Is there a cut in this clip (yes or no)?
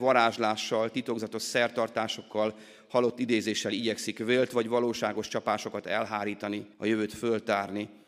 yes